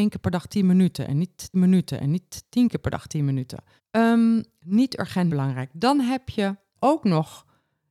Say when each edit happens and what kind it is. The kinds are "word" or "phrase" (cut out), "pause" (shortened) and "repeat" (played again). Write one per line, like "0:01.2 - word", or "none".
0:01.5 - repeat
0:03.8 - pause
0:05.3 - word
0:06.7 - pause